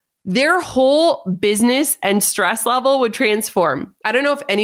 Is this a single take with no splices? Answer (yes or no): yes